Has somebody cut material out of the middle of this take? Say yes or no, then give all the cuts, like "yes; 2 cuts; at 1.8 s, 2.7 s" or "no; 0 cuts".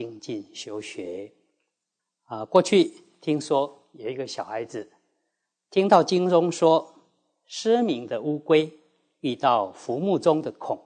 yes; 1 cut; at 2.0 s